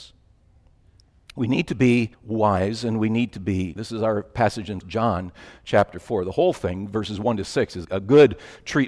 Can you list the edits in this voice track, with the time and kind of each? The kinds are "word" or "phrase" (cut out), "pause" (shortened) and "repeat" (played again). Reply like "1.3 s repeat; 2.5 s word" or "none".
2.1 s pause; 3.8 s word; 4.8 s word; 7.8 s word